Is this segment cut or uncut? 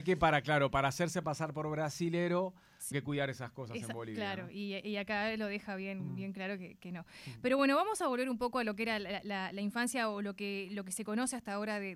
cut